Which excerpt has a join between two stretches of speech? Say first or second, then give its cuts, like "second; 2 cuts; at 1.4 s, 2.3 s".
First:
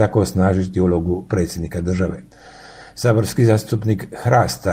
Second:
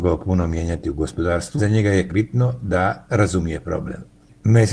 second; 2 cuts; at 1.6 s, 2.1 s